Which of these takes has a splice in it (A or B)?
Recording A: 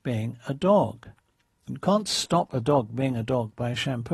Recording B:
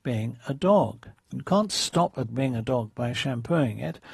B